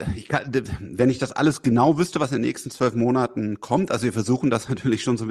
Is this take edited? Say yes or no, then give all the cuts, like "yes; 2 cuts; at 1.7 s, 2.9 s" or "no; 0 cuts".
no; 0 cuts